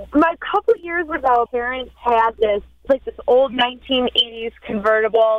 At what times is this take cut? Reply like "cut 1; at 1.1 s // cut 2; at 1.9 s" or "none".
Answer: cut 1; at 1.5 s // cut 2; at 2.9 s